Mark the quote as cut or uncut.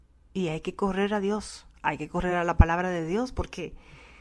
uncut